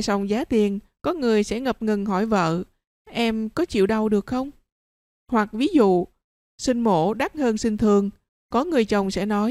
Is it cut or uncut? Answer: uncut